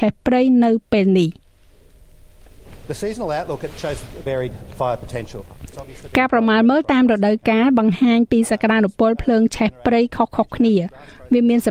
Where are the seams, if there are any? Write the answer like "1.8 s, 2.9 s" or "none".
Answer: 4.3 s